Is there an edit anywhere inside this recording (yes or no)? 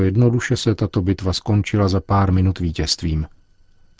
no